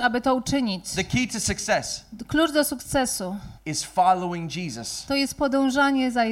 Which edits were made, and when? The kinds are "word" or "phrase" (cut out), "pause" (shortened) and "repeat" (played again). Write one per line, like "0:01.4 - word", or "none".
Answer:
0:03.6 - pause